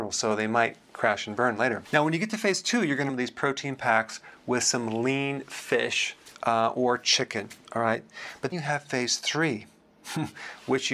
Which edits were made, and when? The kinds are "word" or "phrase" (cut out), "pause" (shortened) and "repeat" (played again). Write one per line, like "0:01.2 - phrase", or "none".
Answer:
0:03.1 - phrase
0:06.3 - pause
0:08.5 - word